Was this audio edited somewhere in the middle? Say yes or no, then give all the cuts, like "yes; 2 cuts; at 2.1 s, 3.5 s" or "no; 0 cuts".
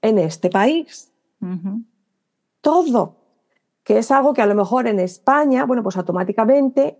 no; 0 cuts